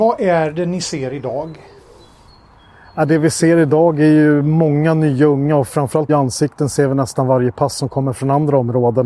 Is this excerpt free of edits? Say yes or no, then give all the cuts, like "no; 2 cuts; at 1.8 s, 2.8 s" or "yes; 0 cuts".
no; 1 cut; at 6.1 s